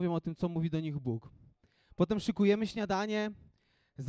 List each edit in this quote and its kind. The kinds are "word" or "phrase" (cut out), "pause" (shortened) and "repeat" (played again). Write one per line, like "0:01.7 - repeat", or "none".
none

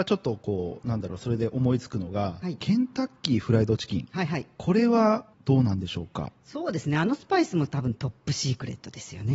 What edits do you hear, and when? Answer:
0:05.3 - pause

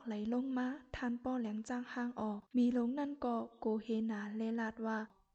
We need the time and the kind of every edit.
0:02.5 - pause

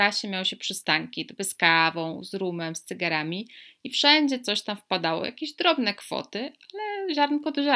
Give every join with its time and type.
0:01.4 - phrase

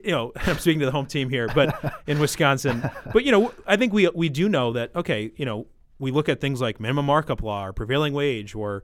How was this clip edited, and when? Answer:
none

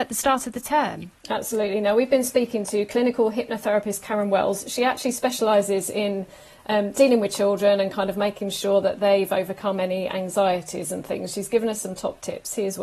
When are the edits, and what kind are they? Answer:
none

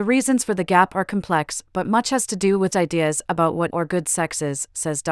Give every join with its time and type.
0:02.7 - word
0:03.7 - word

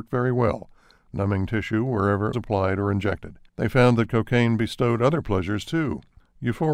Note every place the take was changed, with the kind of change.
0:02.3 - word
0:03.5 - pause

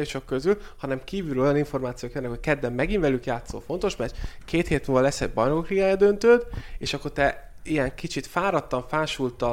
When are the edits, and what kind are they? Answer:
none

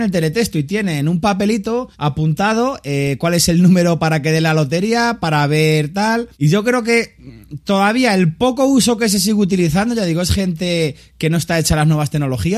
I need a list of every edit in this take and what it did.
0:01.9 - pause
0:06.3 - pause

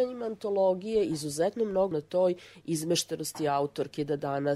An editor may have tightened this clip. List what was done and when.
0:01.9 - word

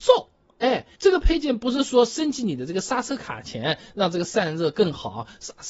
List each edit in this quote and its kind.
0:00.9 - pause

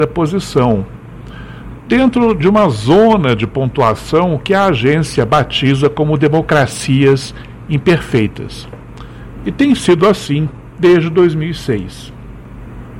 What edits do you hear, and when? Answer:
none

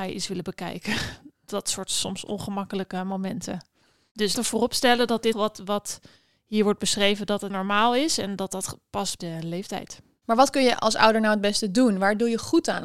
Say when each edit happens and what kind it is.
0:04.3 - word
0:05.3 - word
0:07.5 - word
0:09.2 - word

